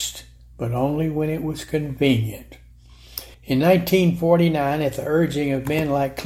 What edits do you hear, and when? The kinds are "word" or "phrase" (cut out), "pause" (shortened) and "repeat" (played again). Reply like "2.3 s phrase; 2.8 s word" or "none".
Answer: 3.3 s pause